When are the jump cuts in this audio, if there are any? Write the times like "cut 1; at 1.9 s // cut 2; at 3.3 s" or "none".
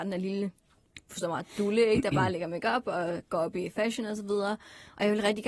none